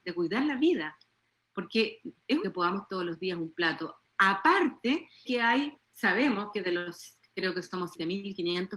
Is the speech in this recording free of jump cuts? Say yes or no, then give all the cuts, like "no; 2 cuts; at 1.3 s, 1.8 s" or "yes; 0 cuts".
no; 3 cuts; at 2.4 s, 2.9 s, 5.3 s